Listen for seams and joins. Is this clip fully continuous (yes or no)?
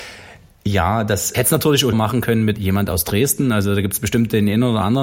no